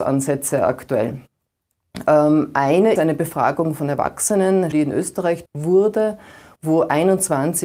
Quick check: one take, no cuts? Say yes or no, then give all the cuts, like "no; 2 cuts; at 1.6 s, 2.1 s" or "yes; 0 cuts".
no; 3 cuts; at 3.0 s, 4.7 s, 5.5 s